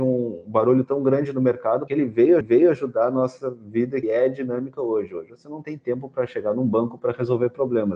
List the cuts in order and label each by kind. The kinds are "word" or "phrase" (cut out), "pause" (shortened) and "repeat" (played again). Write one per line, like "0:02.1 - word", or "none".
0:01.9 - word
0:02.4 - repeat
0:04.0 - word